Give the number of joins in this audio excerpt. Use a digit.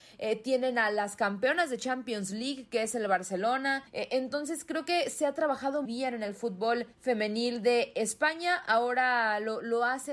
3